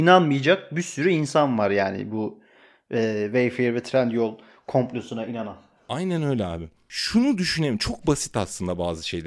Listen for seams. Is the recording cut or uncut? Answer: uncut